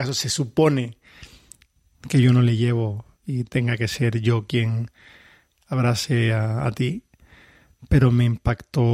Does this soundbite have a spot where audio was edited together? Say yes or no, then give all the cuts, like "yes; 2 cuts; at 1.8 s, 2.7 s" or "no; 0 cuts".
no; 0 cuts